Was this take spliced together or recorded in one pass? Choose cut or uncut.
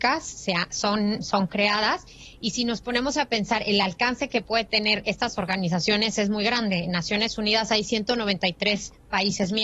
uncut